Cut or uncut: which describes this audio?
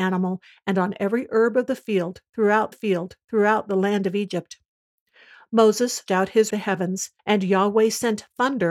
cut